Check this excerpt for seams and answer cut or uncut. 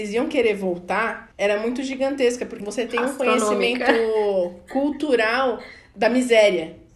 cut